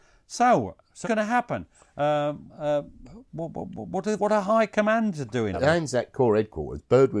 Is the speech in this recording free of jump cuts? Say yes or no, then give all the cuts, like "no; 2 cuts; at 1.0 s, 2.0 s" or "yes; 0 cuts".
no; 5 cuts; at 1.0 s, 2.5 s, 3.5 s, 4.2 s, 5.5 s